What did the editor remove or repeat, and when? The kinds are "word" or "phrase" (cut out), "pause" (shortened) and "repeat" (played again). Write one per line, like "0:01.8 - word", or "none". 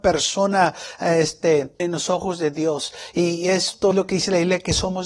0:01.8 - word
0:03.9 - word